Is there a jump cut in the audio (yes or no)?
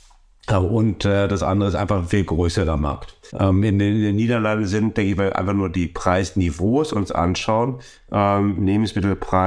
yes